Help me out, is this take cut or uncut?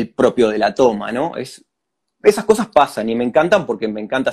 uncut